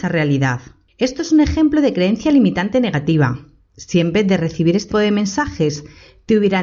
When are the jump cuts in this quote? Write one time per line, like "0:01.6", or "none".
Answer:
0:04.9